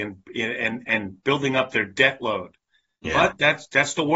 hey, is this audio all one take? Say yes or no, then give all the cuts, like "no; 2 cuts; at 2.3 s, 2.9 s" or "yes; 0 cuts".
yes; 0 cuts